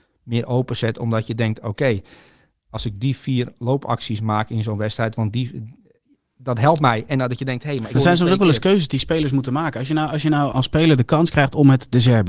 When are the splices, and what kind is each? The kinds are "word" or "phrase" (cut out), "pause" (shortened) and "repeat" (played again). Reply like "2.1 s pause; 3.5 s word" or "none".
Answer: 7.9 s word; 10.5 s word